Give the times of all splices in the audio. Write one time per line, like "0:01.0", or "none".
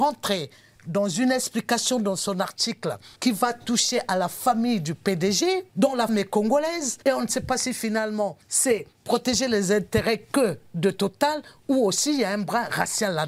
0:03.2
0:05.7
0:06.1
0:07.0
0:08.4